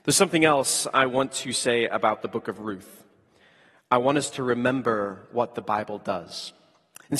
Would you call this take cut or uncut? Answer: uncut